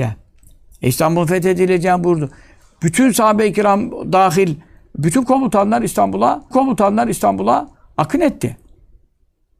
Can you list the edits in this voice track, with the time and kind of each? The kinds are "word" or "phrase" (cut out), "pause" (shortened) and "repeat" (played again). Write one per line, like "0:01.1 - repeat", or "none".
0:06.5 - repeat